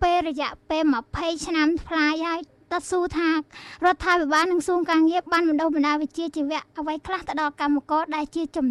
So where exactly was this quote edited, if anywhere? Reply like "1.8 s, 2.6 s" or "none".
none